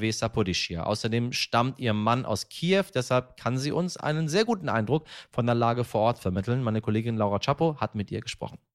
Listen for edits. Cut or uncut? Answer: uncut